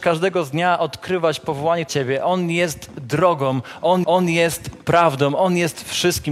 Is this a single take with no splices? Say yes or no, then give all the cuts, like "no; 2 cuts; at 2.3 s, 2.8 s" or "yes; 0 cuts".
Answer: no; 2 cuts; at 1.9 s, 4.0 s